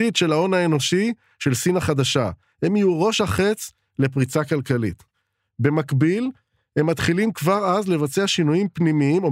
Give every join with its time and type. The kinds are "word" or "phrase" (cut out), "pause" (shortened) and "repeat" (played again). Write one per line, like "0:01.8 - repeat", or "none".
none